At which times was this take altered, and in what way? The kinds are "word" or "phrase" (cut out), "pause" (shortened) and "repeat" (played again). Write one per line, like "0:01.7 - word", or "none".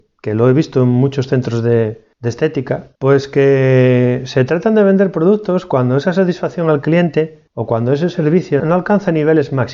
0:02.1 - pause
0:03.0 - pause
0:07.5 - pause
0:08.6 - word